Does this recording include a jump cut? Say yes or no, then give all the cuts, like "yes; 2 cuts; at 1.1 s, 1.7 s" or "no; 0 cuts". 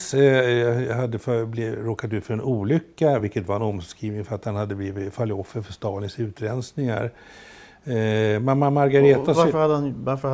no; 0 cuts